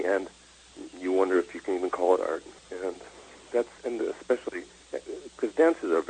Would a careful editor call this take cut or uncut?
cut